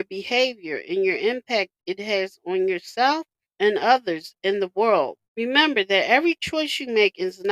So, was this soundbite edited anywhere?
yes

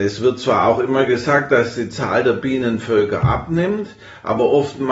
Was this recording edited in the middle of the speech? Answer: no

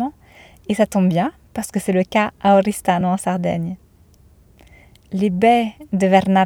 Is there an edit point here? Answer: no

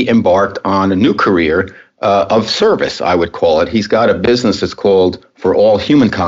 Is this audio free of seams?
yes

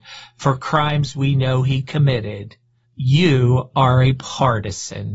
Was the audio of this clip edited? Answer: yes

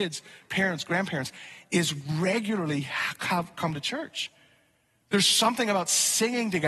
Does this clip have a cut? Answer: no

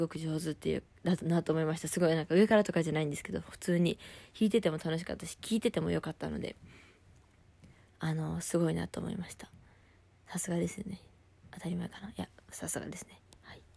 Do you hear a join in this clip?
no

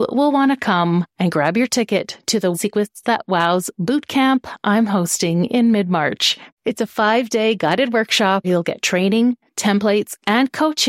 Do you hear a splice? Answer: yes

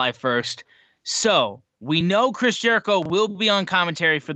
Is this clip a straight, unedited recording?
yes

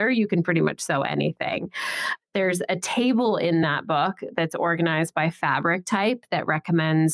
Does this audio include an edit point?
no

